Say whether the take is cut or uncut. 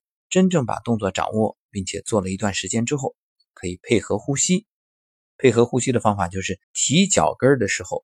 cut